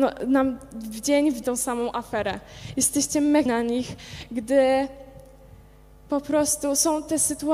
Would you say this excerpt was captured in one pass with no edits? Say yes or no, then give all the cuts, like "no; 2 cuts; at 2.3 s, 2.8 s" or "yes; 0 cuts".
no; 2 cuts; at 1.4 s, 3.5 s